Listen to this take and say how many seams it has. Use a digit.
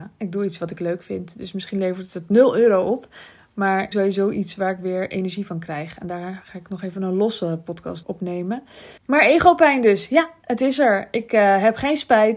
3